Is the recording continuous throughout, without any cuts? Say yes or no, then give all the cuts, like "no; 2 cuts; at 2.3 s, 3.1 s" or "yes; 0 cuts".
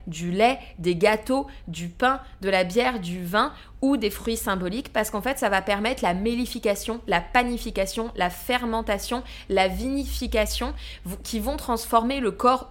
yes; 0 cuts